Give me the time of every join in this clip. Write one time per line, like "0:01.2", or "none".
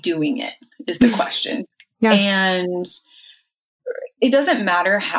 0:01.7